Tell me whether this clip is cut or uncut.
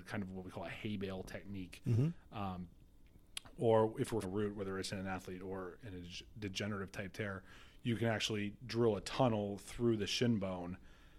cut